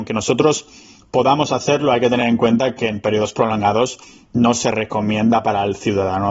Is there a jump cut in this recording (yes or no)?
no